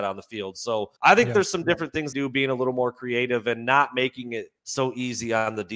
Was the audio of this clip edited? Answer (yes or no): yes